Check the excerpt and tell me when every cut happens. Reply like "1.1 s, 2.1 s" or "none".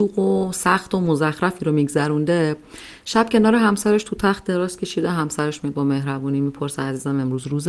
none